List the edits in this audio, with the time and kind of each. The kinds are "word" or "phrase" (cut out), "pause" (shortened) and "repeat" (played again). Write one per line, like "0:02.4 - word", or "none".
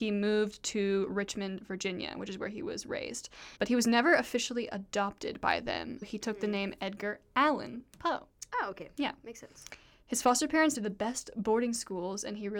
0:03.6 - pause
0:06.0 - word
0:10.7 - phrase